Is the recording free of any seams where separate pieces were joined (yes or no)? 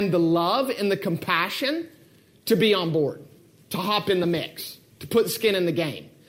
yes